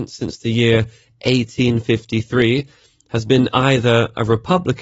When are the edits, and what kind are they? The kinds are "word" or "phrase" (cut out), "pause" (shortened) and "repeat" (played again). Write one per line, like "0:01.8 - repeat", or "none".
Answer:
none